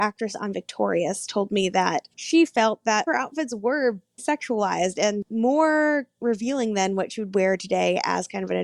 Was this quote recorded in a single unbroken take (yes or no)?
no